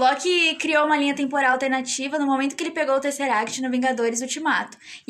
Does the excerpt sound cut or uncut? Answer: uncut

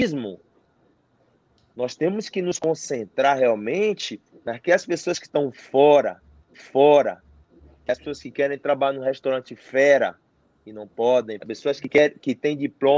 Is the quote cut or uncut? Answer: cut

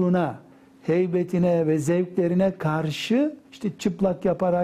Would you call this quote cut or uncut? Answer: cut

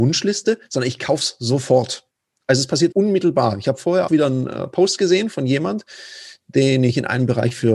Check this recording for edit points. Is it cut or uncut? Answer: cut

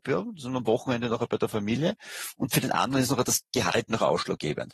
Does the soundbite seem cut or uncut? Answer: uncut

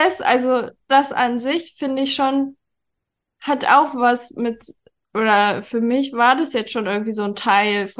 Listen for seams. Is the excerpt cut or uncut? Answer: uncut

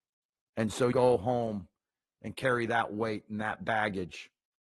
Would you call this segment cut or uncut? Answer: cut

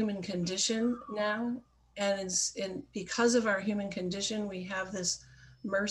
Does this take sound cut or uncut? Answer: uncut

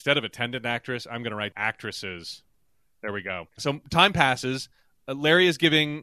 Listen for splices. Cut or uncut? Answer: cut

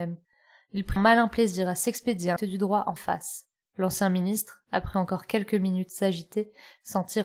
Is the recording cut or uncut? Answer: cut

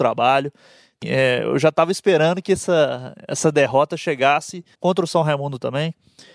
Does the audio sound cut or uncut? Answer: cut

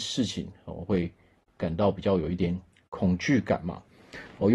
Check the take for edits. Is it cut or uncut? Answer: uncut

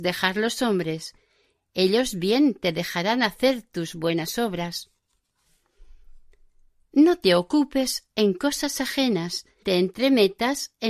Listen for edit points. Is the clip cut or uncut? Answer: cut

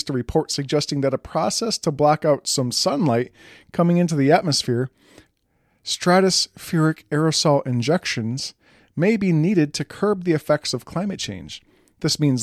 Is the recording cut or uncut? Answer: uncut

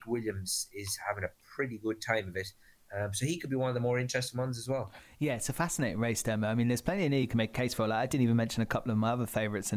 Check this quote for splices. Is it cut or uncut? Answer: uncut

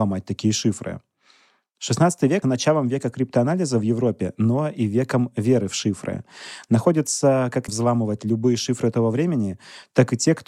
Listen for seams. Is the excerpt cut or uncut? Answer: cut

